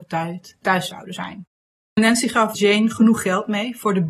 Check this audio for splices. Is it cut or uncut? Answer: uncut